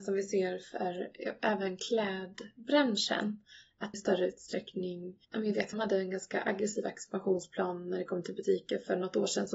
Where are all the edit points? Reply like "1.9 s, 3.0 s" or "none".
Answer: 3.9 s, 5.2 s, 5.7 s